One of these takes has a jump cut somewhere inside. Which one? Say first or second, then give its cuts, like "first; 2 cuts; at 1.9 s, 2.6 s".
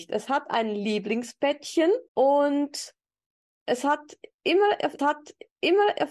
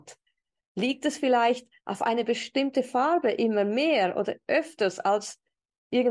first; 2 cuts; at 2.1 s, 5.0 s